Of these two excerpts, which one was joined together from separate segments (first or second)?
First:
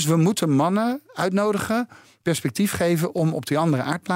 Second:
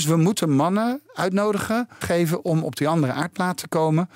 second